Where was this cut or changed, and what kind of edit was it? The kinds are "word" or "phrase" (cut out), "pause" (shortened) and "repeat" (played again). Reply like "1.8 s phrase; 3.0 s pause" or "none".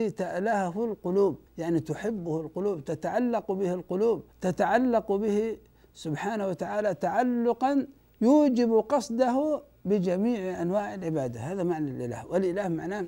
1.5 s pause; 4.3 s pause; 8.0 s pause